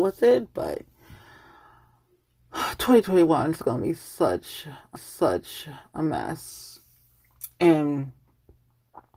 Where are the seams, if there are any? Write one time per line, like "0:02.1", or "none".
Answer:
0:05.0

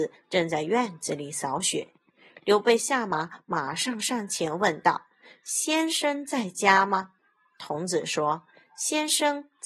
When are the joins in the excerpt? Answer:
0:07.2

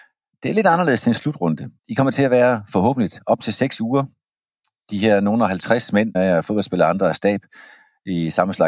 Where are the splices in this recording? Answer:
0:01.8
0:06.1

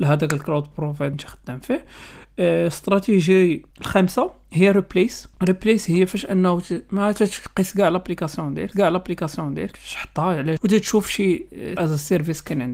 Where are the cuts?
0:01.1
0:03.7
0:05.3
0:08.7
0:10.6
0:11.8

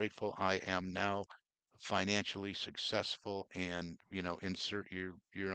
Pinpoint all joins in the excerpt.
none

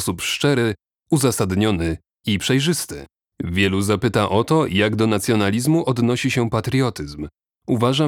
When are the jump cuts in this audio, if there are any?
none

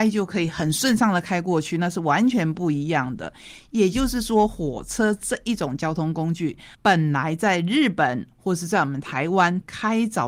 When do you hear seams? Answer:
0:06.7

